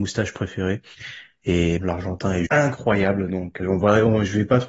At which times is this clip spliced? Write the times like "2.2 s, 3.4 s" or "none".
1.8 s, 2.5 s, 3.6 s

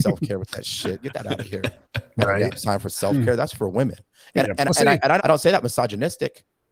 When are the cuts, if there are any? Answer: 5.2 s

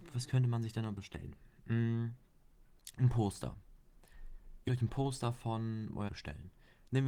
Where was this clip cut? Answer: 1.0 s, 4.7 s, 6.1 s

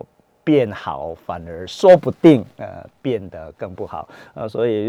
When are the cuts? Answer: none

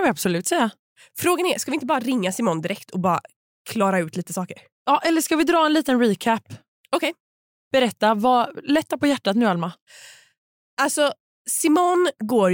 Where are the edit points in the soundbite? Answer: none

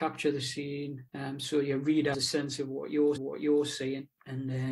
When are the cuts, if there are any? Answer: 1.1 s, 2.1 s, 3.2 s

